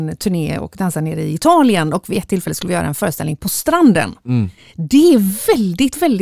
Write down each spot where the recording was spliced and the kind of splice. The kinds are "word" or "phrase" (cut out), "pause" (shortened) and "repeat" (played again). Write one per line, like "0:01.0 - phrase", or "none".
none